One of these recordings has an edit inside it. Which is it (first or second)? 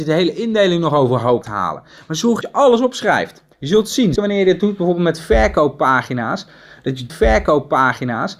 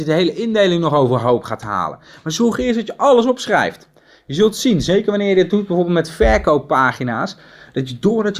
first